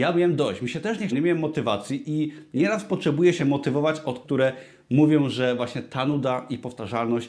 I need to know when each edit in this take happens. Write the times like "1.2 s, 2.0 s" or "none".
1.1 s, 3.4 s, 4.2 s